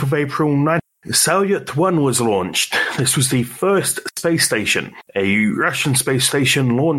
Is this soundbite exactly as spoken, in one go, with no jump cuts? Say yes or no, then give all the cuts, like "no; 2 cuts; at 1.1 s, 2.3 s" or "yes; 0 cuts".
yes; 0 cuts